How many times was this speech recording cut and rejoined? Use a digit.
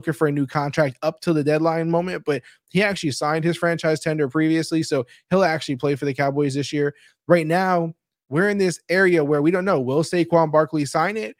0